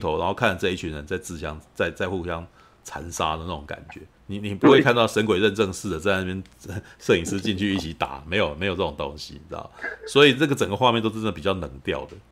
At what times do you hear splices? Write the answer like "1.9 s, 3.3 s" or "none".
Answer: 4.2 s